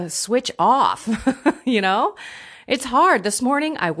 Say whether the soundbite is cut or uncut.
uncut